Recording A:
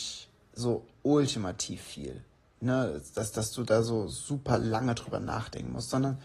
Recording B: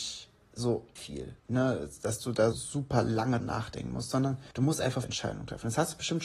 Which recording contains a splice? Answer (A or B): B